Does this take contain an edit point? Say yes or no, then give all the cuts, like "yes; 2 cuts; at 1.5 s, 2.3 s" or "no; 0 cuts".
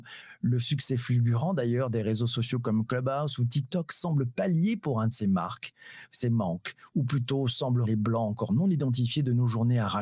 yes; 2 cuts; at 5.1 s, 7.8 s